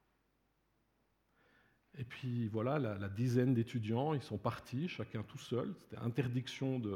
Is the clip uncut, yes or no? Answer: yes